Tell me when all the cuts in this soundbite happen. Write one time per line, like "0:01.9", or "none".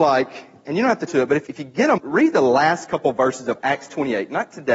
0:01.1
0:01.5
0:02.0
0:03.6